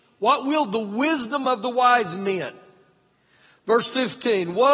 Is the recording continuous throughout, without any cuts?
yes; 0 cuts

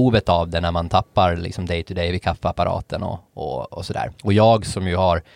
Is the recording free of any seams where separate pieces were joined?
no; 1 cut; at 4.2 s

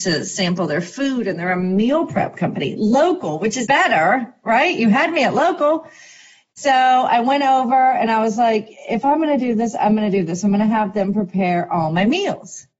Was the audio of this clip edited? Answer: yes; 1 cut; at 3.6 s

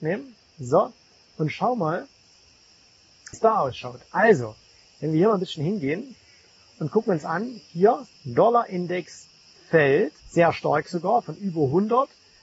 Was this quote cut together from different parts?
yes; 3 cuts; at 3.3 s, 8.1 s, 10.2 s

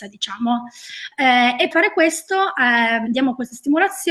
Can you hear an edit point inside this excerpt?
yes; 2 cuts; at 1.7 s, 3.1 s

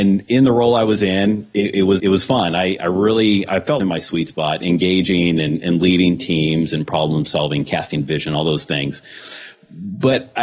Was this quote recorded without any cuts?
no; 2 cuts; at 2.0 s, 3.8 s

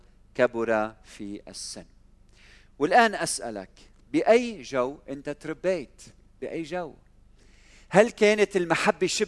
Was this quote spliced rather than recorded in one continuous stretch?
no; 0 cuts

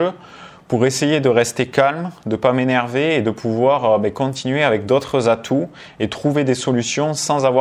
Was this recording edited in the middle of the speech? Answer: no; 0 cuts

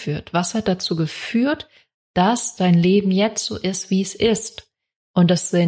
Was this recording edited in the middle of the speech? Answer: no; 0 cuts

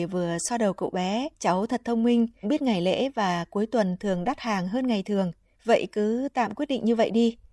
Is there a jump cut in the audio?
yes; 3 cuts; at 1.3 s, 2.4 s, 5.5 s

